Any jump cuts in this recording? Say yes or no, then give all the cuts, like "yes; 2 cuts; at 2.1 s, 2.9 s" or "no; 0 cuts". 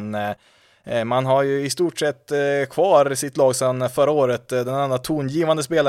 no; 0 cuts